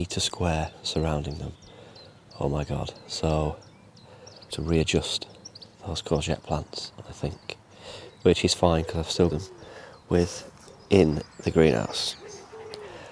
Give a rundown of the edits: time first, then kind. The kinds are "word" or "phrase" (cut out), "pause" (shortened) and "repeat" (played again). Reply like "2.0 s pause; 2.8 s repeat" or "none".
4.5 s phrase; 5.7 s pause; 9.3 s phrase